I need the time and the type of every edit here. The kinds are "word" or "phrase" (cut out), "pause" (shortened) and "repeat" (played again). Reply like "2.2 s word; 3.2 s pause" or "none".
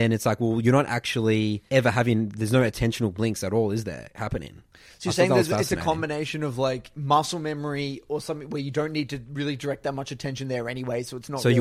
1.7 s pause; 4.7 s pause